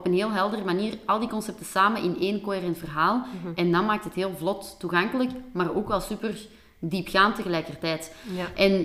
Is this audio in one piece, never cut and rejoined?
yes; 0 cuts

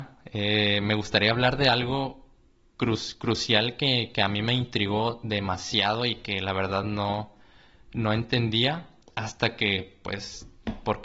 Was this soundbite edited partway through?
no; 0 cuts

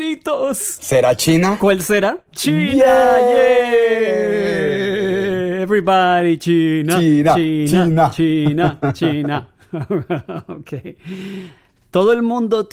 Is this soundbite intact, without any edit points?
yes; 0 cuts

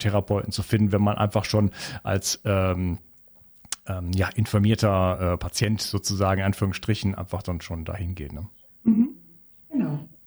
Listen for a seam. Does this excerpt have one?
no; 0 cuts

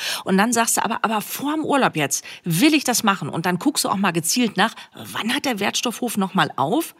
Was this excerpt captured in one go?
yes; 0 cuts

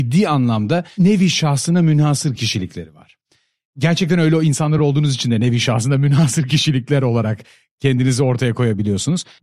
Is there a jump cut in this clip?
no; 0 cuts

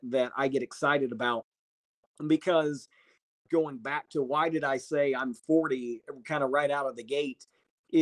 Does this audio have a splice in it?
no; 0 cuts

